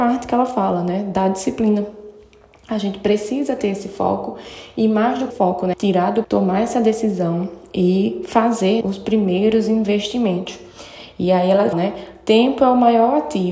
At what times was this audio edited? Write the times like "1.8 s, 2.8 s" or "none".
5.3 s, 5.7 s, 6.2 s, 8.8 s, 11.7 s